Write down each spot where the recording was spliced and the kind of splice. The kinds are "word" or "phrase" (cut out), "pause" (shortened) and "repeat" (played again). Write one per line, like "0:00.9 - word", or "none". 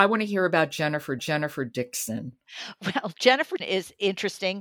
0:01.2 - repeat
0:03.6 - word